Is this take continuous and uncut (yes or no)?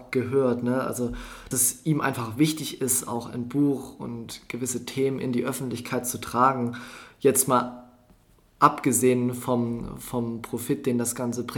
no